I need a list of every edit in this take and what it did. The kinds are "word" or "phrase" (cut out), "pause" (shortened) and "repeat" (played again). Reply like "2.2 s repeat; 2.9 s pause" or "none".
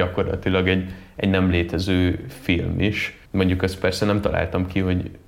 3.3 s pause